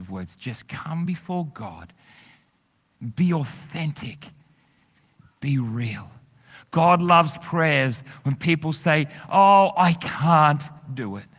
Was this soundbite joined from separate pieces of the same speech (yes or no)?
no